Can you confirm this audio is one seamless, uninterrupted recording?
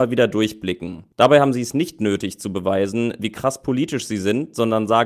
yes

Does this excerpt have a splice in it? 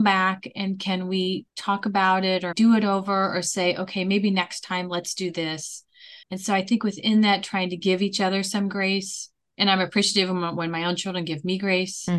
yes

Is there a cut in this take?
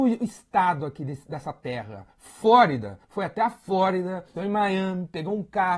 yes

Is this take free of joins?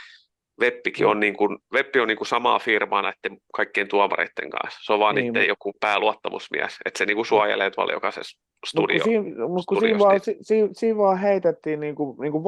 yes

